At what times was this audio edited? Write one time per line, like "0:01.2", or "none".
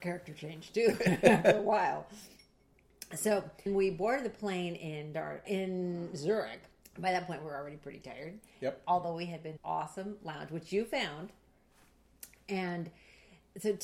0:03.7
0:05.4
0:06.8
0:09.6